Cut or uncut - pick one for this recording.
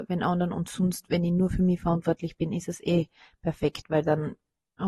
uncut